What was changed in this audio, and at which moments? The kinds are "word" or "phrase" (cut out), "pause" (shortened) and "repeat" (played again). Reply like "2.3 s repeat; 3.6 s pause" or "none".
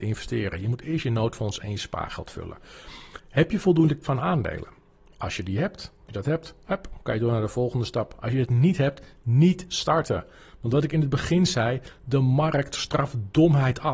4.0 s word; 6.1 s word